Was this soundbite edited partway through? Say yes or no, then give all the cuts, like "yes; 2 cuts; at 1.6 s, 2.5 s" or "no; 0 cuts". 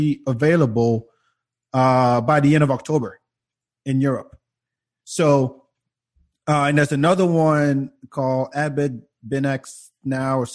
no; 0 cuts